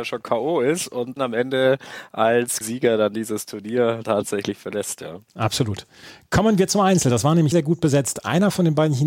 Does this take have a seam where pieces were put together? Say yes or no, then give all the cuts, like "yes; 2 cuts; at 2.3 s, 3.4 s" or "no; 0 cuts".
yes; 4 cuts; at 1.2 s, 2.6 s, 4.0 s, 7.5 s